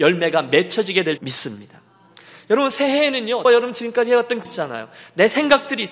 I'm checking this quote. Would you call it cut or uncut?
cut